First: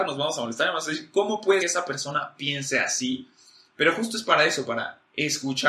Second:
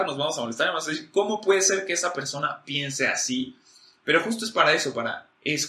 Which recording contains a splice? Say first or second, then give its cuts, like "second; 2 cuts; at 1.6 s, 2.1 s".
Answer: first; 1 cut; at 1.6 s